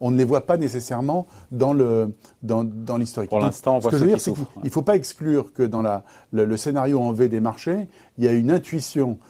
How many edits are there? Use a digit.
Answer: 0